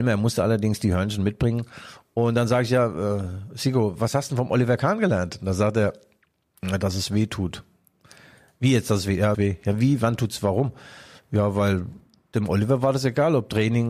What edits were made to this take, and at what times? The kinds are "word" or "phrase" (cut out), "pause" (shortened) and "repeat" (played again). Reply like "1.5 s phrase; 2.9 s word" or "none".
9.3 s phrase